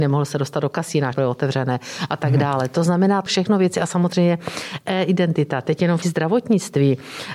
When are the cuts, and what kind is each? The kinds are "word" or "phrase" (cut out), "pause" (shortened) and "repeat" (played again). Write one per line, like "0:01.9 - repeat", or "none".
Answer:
0:01.1 - word
0:03.3 - word
0:06.0 - word